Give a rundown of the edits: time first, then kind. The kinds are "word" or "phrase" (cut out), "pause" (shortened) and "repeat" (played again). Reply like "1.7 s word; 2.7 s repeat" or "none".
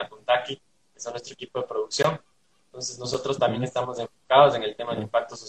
none